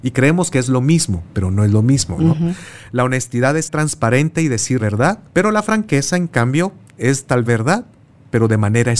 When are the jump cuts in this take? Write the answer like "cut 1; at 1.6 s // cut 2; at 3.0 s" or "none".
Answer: cut 1; at 3.6 s // cut 2; at 4.8 s // cut 3; at 5.3 s // cut 4; at 7.5 s